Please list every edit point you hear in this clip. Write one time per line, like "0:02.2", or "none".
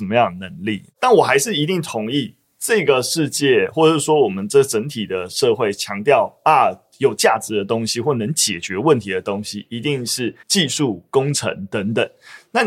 0:10.4